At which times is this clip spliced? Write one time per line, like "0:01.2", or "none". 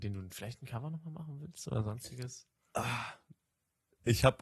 none